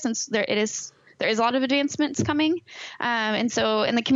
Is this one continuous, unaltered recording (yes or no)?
yes